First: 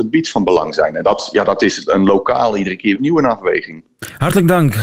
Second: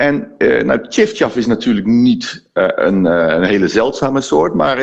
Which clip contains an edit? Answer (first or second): first